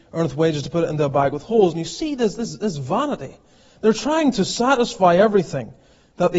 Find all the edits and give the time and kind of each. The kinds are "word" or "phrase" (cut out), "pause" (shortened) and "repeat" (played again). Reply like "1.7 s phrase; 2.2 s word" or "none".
none